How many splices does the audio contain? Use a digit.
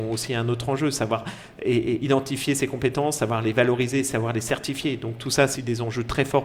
1